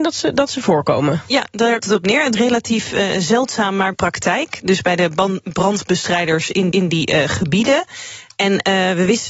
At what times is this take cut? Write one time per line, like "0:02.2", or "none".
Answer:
0:01.8
0:02.4
0:03.9
0:06.7